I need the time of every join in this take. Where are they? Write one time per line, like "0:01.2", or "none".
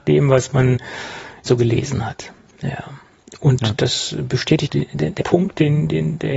0:01.5
0:04.7
0:05.2